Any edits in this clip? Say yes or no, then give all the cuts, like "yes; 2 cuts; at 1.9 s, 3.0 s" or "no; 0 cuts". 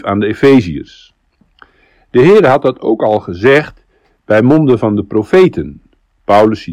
no; 0 cuts